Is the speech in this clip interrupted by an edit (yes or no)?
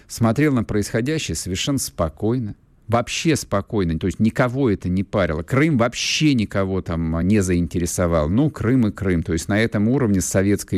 no